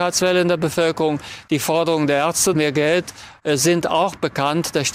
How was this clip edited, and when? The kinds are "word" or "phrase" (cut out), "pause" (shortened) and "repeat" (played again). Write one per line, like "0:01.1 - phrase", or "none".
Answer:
0:02.5 - word